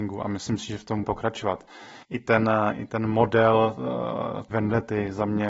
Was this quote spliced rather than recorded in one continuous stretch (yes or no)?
yes